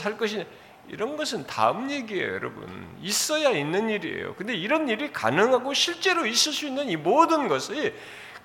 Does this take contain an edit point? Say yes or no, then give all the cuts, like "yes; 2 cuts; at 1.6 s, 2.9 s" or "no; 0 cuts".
no; 0 cuts